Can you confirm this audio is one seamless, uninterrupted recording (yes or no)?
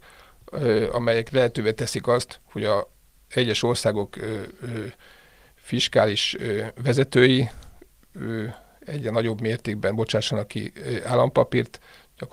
yes